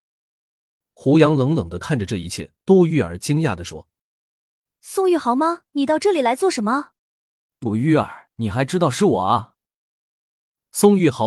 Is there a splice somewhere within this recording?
yes; 5 cuts; at 2.6 s, 4.1 s, 5.7 s, 6.9 s, 8.3 s

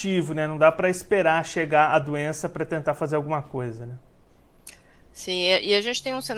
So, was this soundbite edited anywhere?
no; 0 cuts

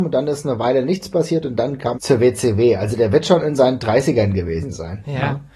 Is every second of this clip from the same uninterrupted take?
no; 1 cut; at 1.9 s

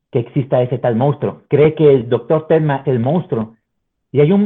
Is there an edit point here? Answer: yes; 1 cut; at 2.8 s

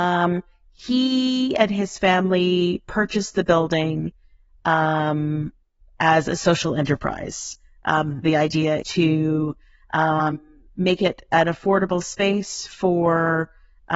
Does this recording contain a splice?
yes; 2 cuts; at 8.2 s, 8.8 s

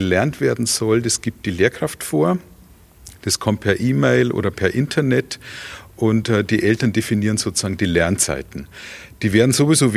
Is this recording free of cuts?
yes; 0 cuts

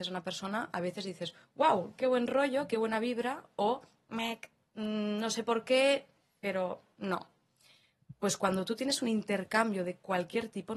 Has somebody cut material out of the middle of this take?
no; 0 cuts

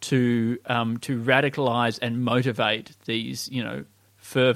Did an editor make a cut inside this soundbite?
no; 0 cuts

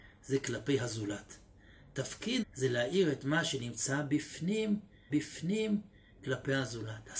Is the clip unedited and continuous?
no; 2 cuts; at 2.4 s, 5.1 s

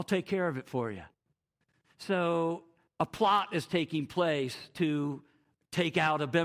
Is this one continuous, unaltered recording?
yes; 0 cuts

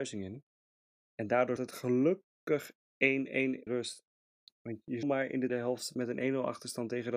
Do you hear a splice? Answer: yes; 4 cuts; at 1.6 s, 3.7 s, 5.0 s, 5.5 s

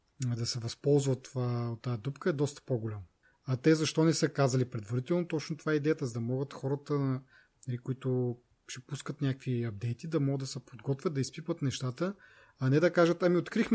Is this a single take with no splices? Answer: yes; 0 cuts

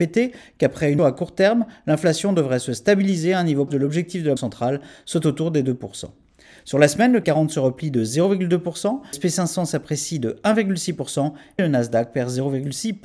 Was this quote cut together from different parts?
yes; 6 cuts; at 1.0 s, 3.7 s, 4.4 s, 7.2 s, 9.1 s, 11.6 s

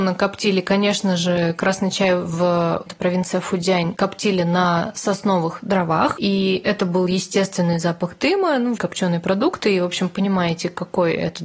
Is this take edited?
yes; 2 cuts; at 2.9 s, 8.8 s

